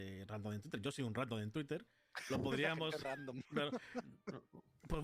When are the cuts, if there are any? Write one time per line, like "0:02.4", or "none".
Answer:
none